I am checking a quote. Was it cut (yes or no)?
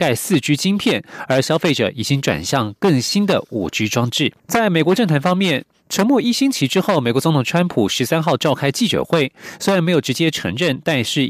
yes